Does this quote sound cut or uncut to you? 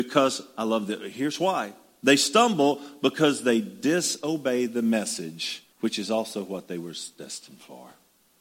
cut